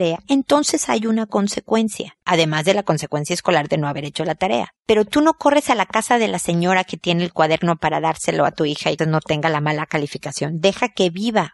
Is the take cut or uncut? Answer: cut